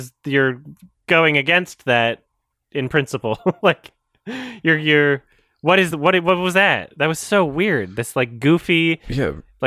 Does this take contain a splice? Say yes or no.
no